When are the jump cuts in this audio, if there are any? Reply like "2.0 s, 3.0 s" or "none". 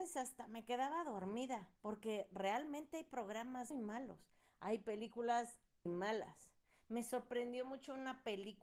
1.8 s, 3.7 s, 5.9 s

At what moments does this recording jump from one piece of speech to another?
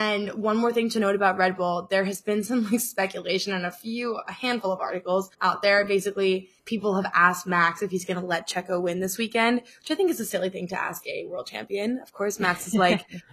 5.3 s, 6.6 s

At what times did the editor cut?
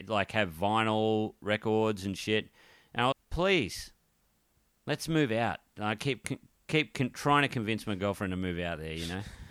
3.1 s

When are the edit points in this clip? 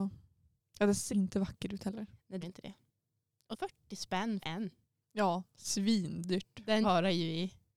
1.1 s, 2.4 s, 3.5 s, 4.4 s, 6.8 s

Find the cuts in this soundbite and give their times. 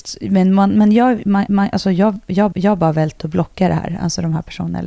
1.5 s, 2.5 s

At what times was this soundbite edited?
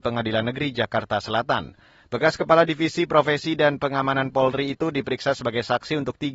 none

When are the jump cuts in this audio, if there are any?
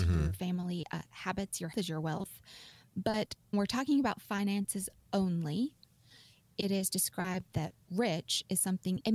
1.1 s, 1.7 s, 3.5 s

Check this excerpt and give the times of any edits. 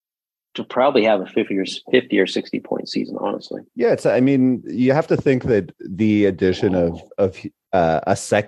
3.7 s

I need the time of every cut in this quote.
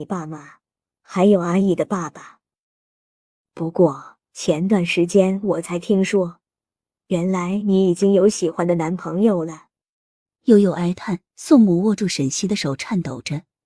4.2 s, 10.1 s, 11.3 s

